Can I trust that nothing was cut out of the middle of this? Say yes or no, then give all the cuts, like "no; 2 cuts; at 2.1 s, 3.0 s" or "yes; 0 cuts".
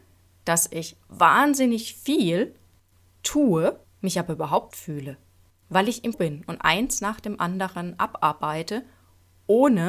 no; 4 cuts; at 3.8 s, 4.7 s, 6.1 s, 6.6 s